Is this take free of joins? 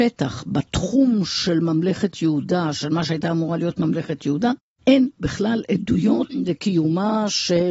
yes; 0 cuts

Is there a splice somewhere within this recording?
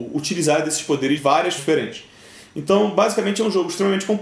yes; 2 cuts; at 1.2 s, 1.6 s

